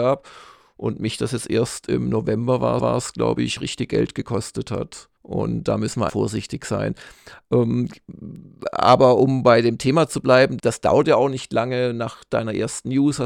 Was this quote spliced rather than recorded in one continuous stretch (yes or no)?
yes